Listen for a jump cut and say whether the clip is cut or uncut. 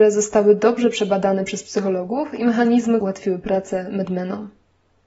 cut